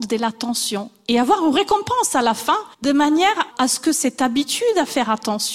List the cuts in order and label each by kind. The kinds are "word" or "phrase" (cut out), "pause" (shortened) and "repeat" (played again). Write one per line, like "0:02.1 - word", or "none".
0:02.7 - pause
0:03.5 - word